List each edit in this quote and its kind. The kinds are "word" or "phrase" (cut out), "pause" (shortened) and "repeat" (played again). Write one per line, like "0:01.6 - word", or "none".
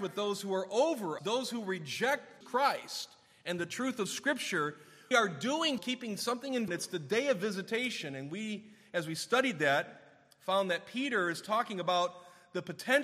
0:01.2 - word
0:02.4 - word
0:05.1 - word
0:05.8 - word
0:06.7 - word